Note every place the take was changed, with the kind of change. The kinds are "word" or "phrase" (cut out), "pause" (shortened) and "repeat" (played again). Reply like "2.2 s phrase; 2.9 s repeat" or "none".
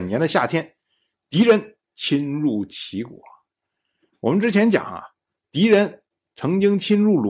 1.8 s pause

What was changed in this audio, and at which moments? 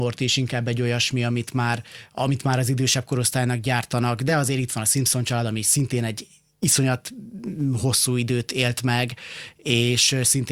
none

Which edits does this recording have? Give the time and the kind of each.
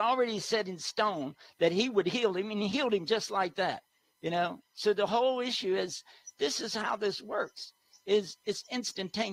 none

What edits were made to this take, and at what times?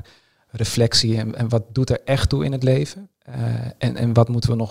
none

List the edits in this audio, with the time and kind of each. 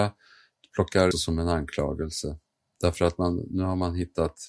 1.1 s phrase

